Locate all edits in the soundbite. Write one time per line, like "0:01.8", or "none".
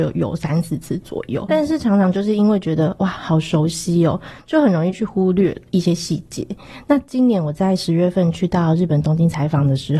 0:01.5